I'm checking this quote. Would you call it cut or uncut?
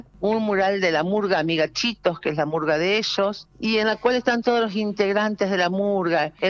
uncut